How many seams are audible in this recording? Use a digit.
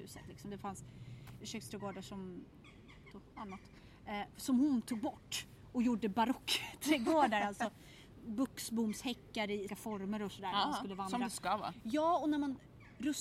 2